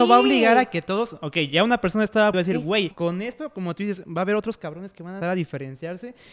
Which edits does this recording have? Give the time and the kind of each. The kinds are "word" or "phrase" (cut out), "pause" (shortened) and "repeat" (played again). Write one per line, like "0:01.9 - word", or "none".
0:02.3 - word
0:02.9 - word
0:05.2 - word